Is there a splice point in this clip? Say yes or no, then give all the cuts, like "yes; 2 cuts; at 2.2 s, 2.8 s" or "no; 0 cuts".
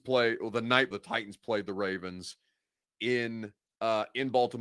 yes; 1 cut; at 0.9 s